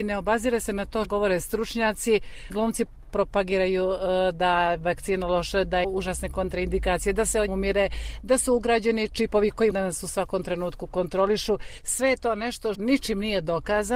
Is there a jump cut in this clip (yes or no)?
yes